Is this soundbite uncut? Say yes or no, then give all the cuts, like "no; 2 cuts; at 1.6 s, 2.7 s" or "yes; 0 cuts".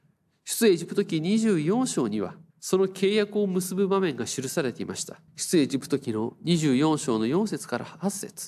no; 2 cuts; at 2.5 s, 5.3 s